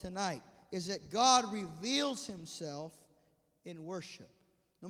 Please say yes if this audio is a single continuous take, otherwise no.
yes